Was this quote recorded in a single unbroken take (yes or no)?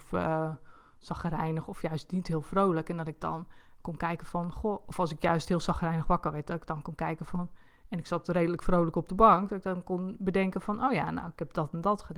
yes